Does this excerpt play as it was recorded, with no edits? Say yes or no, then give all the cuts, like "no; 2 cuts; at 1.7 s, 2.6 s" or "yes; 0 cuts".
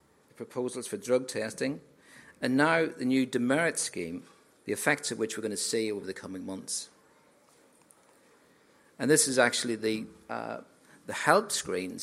yes; 0 cuts